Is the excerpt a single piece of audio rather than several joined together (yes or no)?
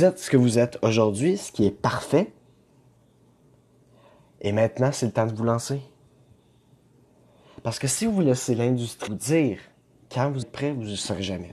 no